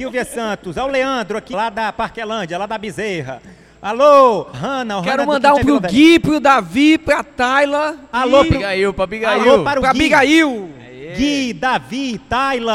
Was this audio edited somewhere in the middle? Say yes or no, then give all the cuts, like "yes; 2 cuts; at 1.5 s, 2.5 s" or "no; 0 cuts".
yes; 3 cuts; at 1.5 s, 4.5 s, 5.6 s